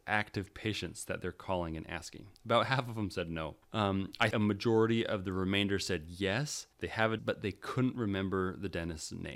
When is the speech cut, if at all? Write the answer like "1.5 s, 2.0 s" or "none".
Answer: 2.3 s, 3.6 s, 4.3 s, 6.7 s, 7.2 s